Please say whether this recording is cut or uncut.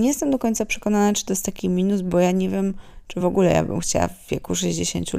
uncut